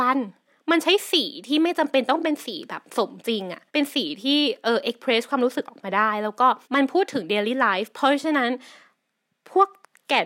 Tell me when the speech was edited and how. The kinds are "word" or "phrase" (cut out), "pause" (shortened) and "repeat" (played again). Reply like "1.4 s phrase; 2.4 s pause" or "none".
3.7 s pause; 6.6 s pause

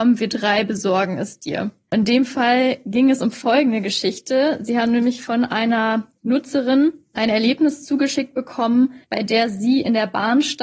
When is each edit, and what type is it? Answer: 9.0 s pause

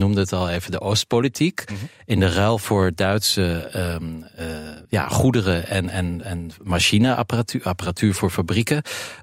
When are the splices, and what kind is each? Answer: 4.8 s pause

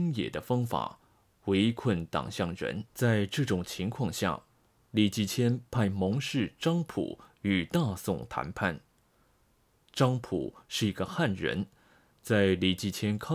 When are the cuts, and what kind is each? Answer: 2.9 s pause

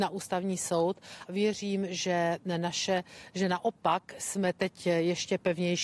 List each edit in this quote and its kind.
1.3 s word

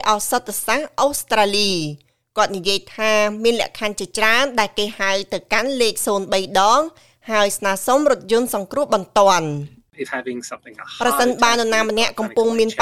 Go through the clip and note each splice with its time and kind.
10.0 s word; 10.8 s word

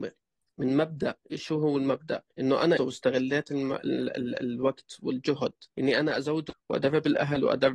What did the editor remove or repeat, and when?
1.2 s pause; 2.3 s pause; 2.8 s phrase; 5.7 s pause; 6.5 s word

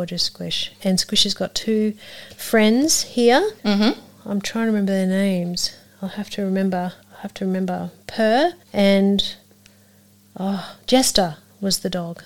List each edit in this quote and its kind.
3.6 s pause; 7.0 s pause; 8.6 s pause

